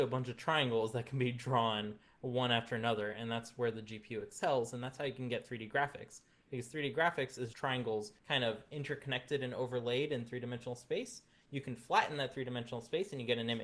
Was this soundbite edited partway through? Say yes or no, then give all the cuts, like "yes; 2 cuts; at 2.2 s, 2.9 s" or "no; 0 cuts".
yes; 2 cuts; at 7.5 s, 8.2 s